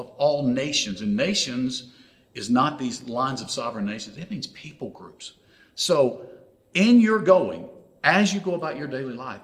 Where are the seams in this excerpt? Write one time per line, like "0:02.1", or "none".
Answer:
none